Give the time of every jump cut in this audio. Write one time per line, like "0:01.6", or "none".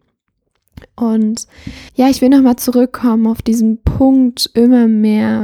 0:01.9